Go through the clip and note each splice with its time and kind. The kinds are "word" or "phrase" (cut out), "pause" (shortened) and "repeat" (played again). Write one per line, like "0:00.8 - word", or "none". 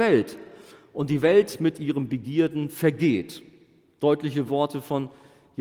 none

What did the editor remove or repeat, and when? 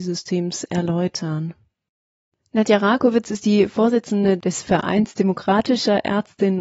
none

